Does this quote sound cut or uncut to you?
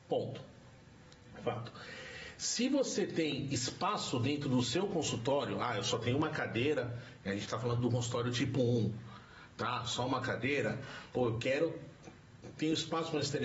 uncut